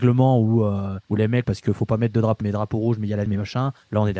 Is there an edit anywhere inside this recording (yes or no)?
yes